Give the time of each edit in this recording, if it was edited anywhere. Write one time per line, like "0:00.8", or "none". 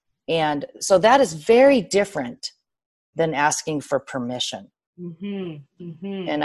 none